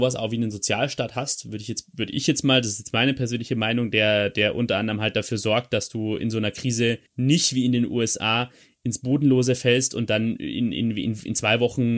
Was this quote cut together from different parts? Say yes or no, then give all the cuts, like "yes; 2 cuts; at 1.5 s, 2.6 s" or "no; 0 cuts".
yes; 1 cut; at 7.1 s